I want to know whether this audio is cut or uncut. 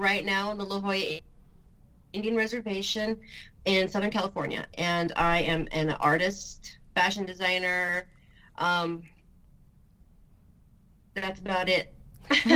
uncut